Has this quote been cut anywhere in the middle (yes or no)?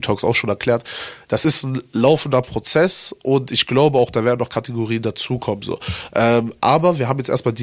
no